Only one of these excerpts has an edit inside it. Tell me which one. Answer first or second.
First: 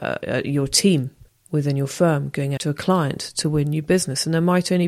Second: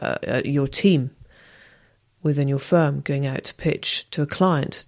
first